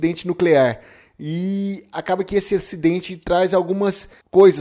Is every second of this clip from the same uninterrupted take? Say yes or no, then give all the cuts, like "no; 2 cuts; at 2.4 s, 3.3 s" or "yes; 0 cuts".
yes; 0 cuts